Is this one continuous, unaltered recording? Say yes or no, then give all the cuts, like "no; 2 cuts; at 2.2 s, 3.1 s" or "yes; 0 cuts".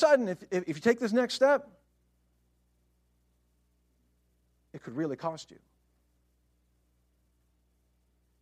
yes; 0 cuts